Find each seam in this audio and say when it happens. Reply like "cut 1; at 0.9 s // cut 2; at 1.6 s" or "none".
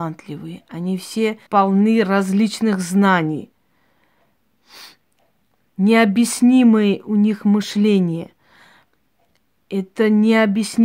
cut 1; at 1.5 s

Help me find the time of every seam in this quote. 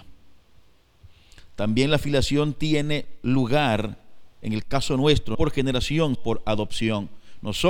cut 1; at 5.3 s // cut 2; at 6.1 s

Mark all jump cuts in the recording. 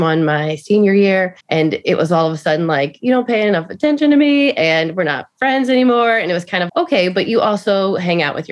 cut 1; at 1.4 s // cut 2; at 6.7 s

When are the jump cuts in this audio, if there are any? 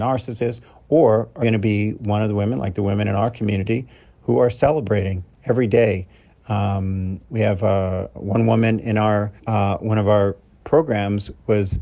cut 1; at 1.4 s // cut 2; at 8.1 s // cut 3; at 9.4 s

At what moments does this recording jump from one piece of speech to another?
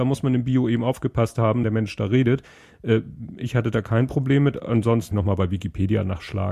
cut 1; at 1.6 s // cut 2; at 5.1 s

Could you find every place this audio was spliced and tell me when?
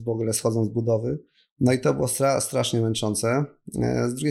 none

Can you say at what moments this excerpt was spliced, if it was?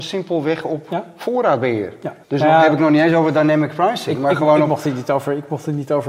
cut 1; at 2.2 s

